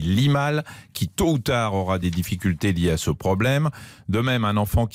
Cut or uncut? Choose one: uncut